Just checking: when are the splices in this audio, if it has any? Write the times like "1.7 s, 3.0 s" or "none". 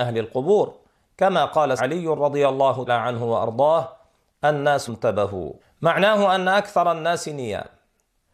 1.8 s, 2.9 s, 4.9 s, 5.6 s